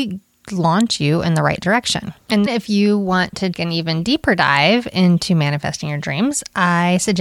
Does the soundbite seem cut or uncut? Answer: cut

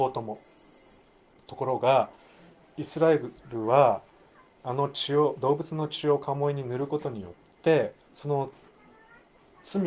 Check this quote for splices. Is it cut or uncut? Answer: uncut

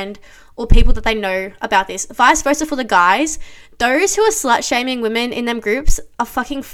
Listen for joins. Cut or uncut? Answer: uncut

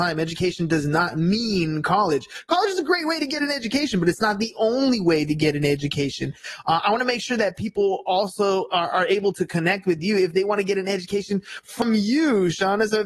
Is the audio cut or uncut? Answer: uncut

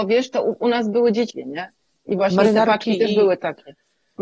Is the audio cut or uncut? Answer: cut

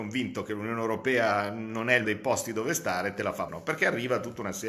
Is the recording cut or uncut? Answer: cut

